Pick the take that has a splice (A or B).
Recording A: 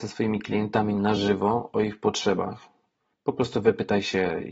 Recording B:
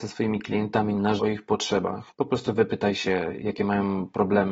B